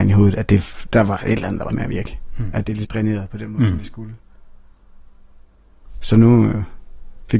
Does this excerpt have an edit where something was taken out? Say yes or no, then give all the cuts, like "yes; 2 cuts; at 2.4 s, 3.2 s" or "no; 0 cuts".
yes; 2 cuts; at 1.7 s, 2.8 s